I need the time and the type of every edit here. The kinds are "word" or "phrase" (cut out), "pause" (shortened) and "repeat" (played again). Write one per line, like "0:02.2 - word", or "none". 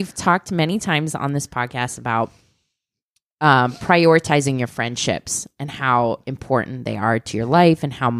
none